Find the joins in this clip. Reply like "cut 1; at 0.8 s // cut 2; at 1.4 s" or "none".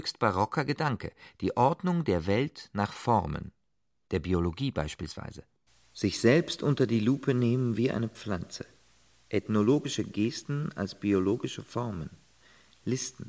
none